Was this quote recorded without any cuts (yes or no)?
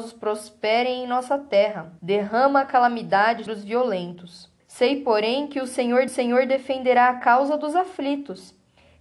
no